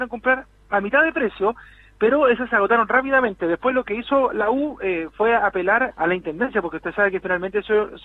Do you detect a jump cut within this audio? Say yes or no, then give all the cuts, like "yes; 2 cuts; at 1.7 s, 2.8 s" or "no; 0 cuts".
yes; 1 cut; at 5.9 s